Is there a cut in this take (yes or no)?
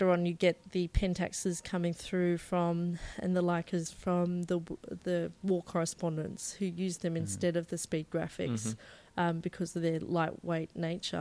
no